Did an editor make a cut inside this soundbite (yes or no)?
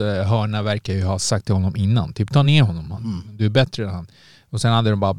no